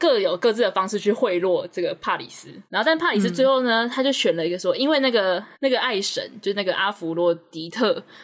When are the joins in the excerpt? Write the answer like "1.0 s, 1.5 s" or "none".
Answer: 2.7 s, 5.5 s